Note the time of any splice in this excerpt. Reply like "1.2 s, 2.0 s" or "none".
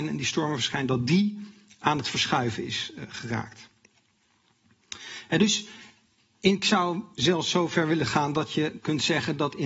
none